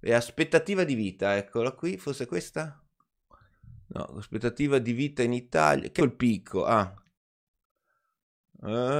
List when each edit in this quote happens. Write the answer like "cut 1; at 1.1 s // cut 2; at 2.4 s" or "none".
cut 1; at 6.0 s